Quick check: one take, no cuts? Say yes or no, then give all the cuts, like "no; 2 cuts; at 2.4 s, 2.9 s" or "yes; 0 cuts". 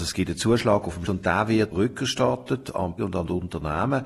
no; 3 cuts; at 1.1 s, 1.7 s, 3.0 s